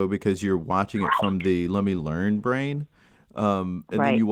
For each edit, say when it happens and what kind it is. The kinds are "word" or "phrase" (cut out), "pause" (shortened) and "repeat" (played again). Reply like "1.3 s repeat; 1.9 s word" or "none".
none

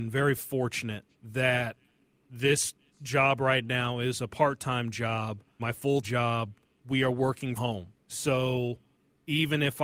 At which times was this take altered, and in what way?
1.1 s pause; 5.6 s word; 6.0 s word; 7.6 s word; 8.0 s pause

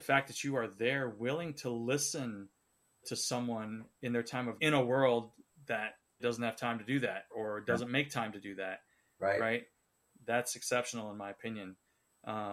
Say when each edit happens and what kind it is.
3.0 s word; 4.6 s word; 6.2 s word; 7.3 s word

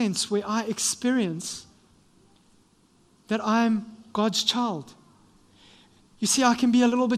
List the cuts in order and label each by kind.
none

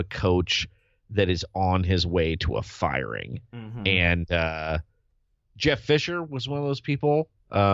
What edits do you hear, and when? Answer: none

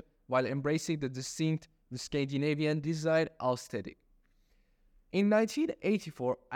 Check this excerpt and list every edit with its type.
none

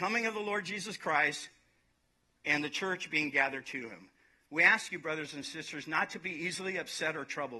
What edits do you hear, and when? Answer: none

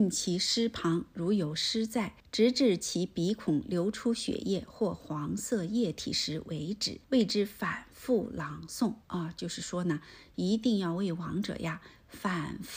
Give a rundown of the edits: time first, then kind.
2.2 s pause; 7.0 s pause; 9.0 s pause

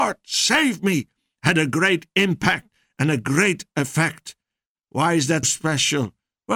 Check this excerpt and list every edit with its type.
5.4 s word

